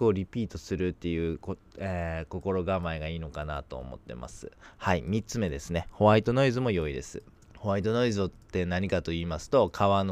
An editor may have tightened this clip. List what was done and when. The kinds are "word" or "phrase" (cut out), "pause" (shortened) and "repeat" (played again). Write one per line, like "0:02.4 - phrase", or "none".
0:07.4 - pause

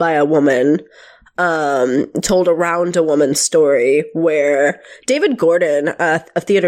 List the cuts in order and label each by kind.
none

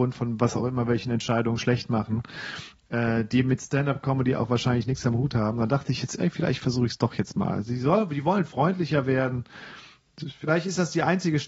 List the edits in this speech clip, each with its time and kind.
none

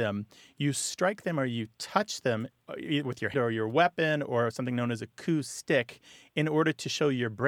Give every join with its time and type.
0:03.3 - word

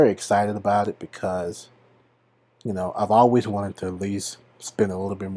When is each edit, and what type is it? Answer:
none

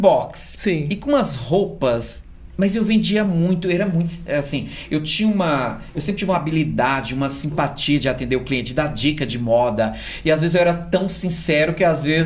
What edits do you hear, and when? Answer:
none

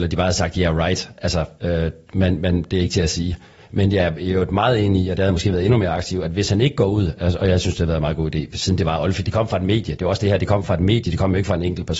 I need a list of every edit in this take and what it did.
0:01.5 - pause

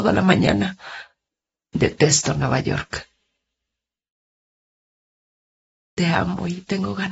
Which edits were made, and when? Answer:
0:01.3 - pause

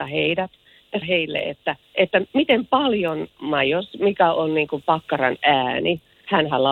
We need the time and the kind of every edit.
0:01.0 - word
0:01.8 - pause
0:03.3 - phrase

